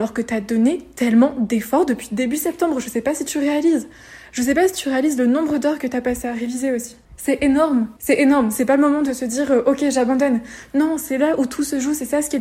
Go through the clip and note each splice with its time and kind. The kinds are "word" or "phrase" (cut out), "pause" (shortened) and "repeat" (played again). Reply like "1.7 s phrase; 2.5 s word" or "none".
7.0 s pause; 8.0 s pause